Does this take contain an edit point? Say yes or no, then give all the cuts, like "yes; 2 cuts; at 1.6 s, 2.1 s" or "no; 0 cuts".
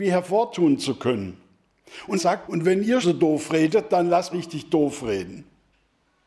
yes; 4 cuts; at 2.2 s, 2.5 s, 3.0 s, 4.3 s